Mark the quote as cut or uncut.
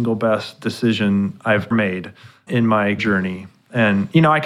cut